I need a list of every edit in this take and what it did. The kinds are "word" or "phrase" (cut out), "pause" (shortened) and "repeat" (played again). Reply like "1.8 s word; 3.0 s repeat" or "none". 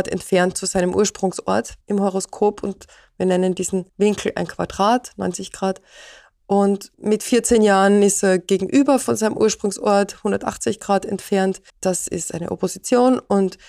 1.8 s pause; 3.9 s pause; 6.9 s pause; 11.7 s pause

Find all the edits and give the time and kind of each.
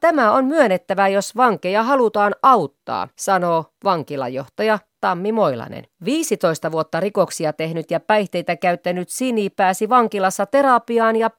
3.1 s pause; 5.9 s pause

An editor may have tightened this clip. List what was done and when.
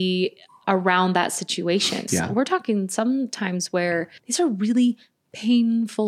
2.1 s phrase; 4.2 s pause

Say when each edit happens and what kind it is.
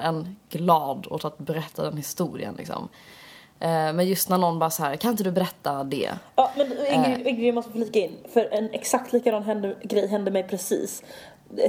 none

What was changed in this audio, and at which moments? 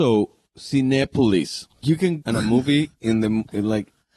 1.8 s word; 2.2 s phrase

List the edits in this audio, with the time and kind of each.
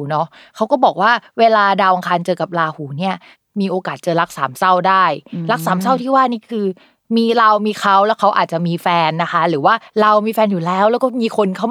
none

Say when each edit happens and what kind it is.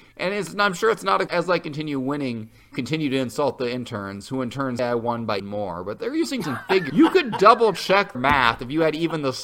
1.3 s word; 2.7 s word; 4.8 s word; 5.4 s word; 6.4 s word; 6.9 s word; 8.1 s word

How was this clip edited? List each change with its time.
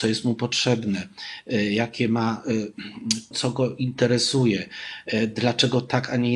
3.3 s word

